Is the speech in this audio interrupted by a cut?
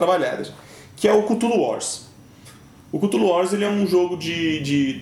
no; 0 cuts

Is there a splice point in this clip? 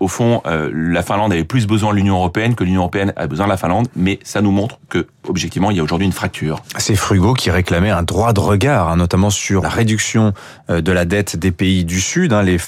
yes; 1 cut; at 9.6 s

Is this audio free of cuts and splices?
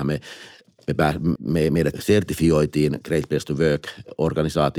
no; 2 cuts; at 1.4 s, 1.9 s

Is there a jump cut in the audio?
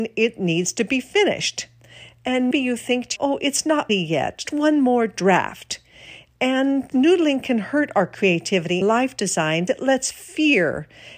yes; 7 cuts; at 2.5 s, 3.2 s, 3.9 s, 4.4 s, 6.9 s, 8.8 s, 9.7 s

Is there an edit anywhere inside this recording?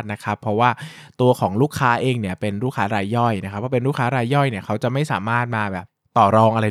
no; 0 cuts

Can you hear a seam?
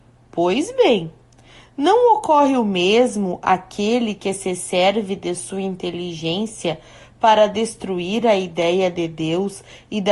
no; 0 cuts

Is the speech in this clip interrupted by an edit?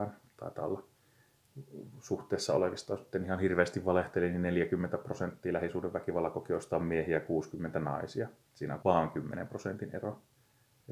yes; 1 cut; at 8.8 s

